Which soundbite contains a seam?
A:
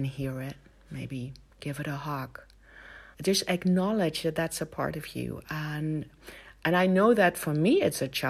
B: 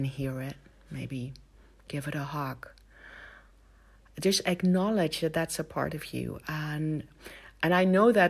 A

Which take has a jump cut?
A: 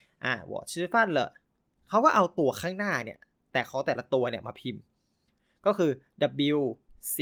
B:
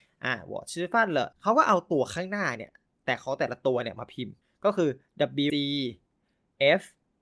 B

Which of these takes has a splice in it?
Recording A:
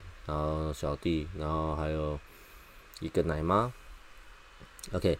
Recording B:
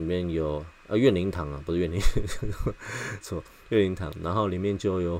B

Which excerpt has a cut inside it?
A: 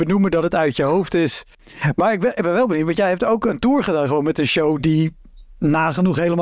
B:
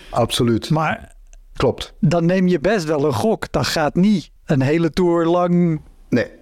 B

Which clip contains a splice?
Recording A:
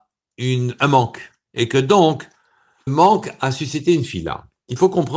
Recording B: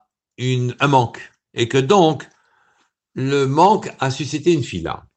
A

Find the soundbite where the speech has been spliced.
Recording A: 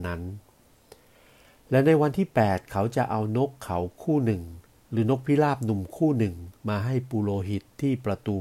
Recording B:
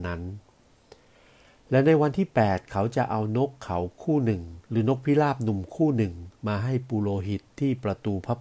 B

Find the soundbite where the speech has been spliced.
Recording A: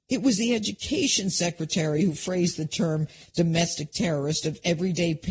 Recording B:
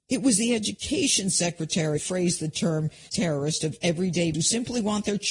B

